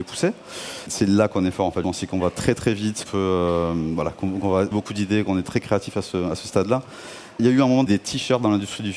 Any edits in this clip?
yes; 6 cuts; at 1.8 s, 3.1 s, 4.7 s, 5.4 s, 7.4 s, 7.9 s

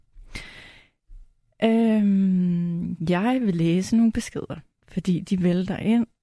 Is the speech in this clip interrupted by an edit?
no; 0 cuts

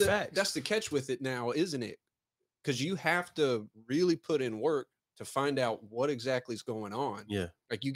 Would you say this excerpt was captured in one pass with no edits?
yes; 0 cuts

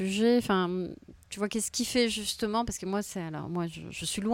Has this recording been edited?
no; 0 cuts

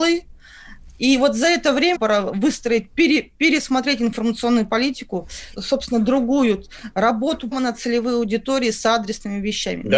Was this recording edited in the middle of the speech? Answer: yes; 3 cuts; at 1.9 s, 5.6 s, 7.5 s

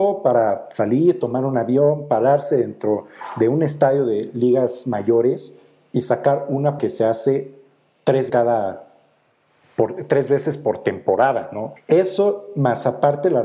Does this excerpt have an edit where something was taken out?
yes; 3 cuts; at 6.8 s, 8.3 s, 11.8 s

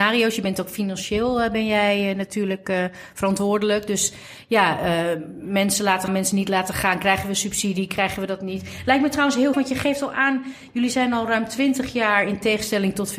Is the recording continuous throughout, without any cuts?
no; 2 cuts; at 6.1 s, 9.5 s

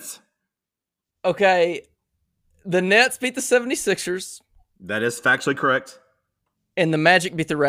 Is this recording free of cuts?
yes; 0 cuts

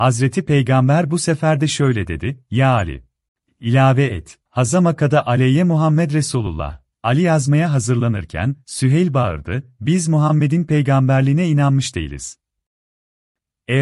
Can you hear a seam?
yes; 3 cuts; at 3.3 s, 4.5 s, 6.9 s

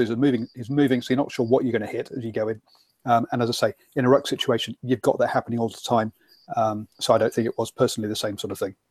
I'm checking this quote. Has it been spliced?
yes; 1 cut; at 6.9 s

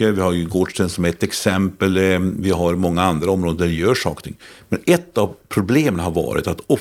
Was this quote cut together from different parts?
no; 0 cuts

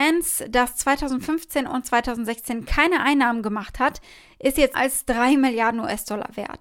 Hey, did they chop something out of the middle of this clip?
yes; 1 cut; at 4.7 s

